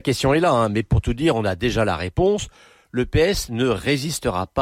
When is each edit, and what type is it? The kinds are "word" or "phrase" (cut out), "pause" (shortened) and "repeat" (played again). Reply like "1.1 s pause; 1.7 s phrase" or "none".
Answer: none